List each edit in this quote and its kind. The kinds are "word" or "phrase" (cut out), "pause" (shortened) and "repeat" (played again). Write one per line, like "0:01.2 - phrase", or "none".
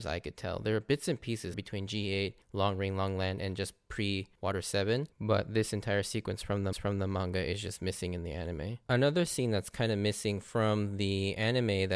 0:01.5 - phrase
0:02.4 - pause
0:04.3 - pause
0:05.1 - pause
0:06.7 - repeat
0:08.8 - pause